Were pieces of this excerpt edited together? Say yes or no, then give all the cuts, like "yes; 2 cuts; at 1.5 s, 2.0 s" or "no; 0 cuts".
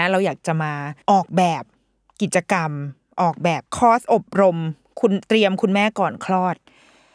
yes; 2 cuts; at 1.0 s, 3.7 s